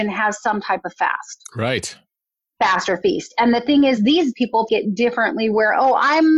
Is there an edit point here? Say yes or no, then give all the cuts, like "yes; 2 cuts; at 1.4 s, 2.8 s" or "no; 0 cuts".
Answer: yes; 3 cuts; at 4.0 s, 4.3 s, 4.7 s